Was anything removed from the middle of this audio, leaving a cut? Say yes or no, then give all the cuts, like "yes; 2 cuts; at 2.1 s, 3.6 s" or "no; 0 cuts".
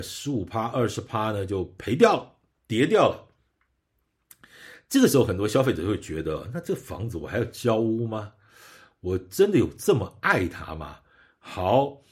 no; 0 cuts